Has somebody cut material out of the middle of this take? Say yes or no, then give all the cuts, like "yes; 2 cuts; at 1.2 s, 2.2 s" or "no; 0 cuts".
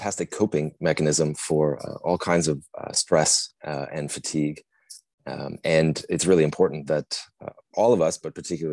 no; 0 cuts